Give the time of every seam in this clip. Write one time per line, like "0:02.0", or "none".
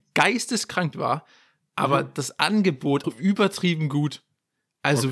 0:00.9
0:03.0